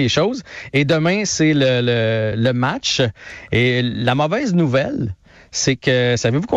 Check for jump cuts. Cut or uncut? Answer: uncut